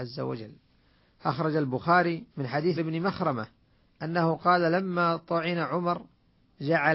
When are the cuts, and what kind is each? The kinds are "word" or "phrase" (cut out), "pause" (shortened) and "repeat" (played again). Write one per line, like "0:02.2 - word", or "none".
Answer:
0:02.3 - pause
0:02.8 - word

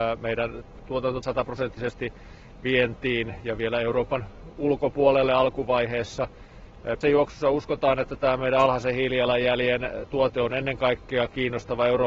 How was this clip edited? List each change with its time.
0:01.2 - phrase
0:07.0 - word

